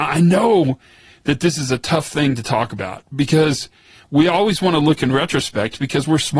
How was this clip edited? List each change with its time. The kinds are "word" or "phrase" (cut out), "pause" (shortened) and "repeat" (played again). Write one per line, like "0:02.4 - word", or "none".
none